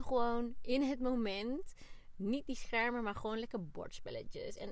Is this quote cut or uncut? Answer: uncut